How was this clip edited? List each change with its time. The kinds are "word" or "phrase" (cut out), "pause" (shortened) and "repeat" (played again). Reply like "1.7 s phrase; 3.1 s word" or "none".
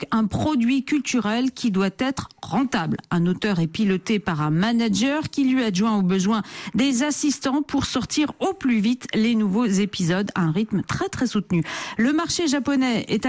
none

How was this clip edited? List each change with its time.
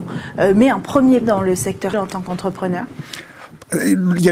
1.2 s word; 1.9 s word

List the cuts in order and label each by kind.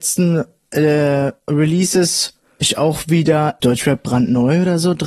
2.6 s word; 3.6 s phrase

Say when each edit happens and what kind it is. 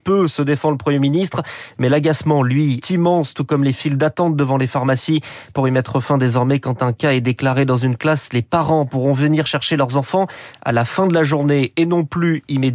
2.8 s word

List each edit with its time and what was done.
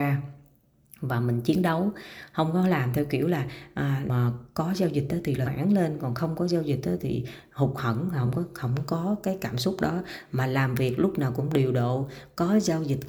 4.1 s word; 5.5 s word

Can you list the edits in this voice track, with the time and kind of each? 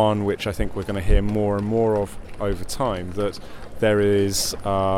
none

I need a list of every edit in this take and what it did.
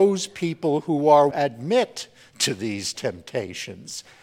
1.3 s phrase

